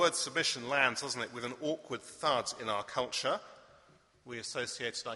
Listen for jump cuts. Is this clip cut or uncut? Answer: uncut